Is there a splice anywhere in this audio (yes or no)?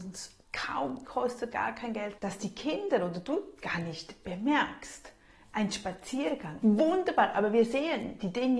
yes